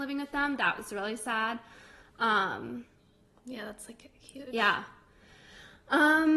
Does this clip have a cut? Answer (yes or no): no